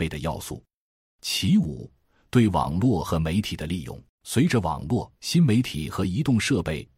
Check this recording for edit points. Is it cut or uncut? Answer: cut